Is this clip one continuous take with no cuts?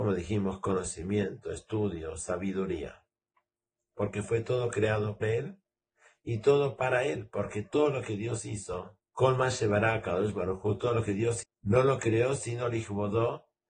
no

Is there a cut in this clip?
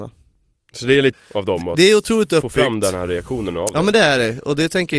yes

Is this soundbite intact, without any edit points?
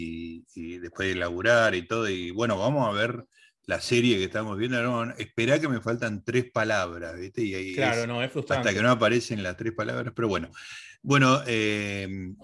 yes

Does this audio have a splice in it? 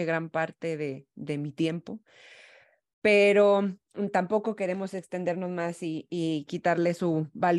no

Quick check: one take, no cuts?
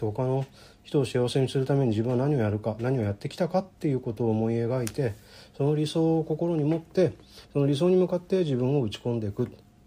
no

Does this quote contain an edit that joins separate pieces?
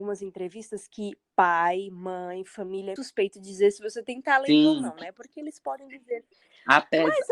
yes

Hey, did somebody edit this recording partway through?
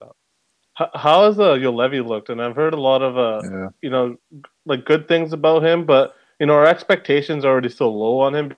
no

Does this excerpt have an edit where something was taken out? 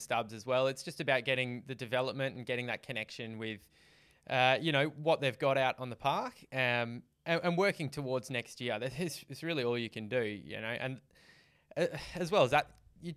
no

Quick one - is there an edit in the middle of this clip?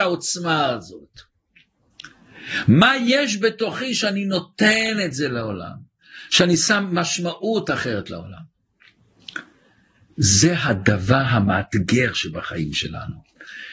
no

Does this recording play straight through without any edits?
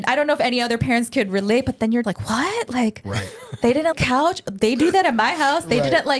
no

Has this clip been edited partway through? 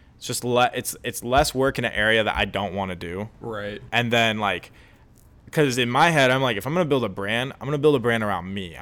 no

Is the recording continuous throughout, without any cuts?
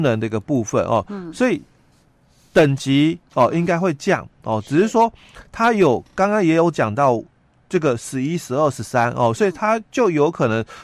yes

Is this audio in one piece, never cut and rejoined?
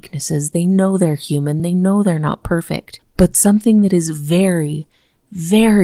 yes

